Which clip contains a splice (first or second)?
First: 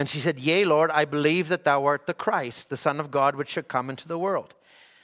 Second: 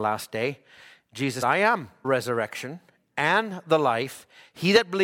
second